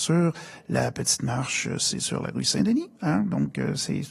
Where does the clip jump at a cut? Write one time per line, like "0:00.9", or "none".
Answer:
none